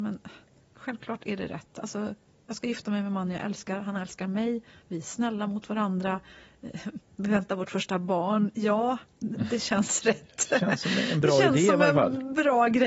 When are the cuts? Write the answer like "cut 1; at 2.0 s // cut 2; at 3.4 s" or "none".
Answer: none